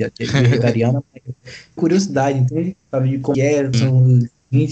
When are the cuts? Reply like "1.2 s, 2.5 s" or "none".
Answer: 1.8 s, 3.3 s, 3.7 s